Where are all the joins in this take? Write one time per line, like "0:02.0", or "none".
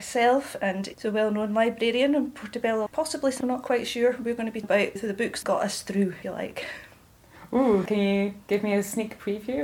0:00.9
0:02.9
0:03.4
0:04.6
0:05.0
0:05.4
0:06.2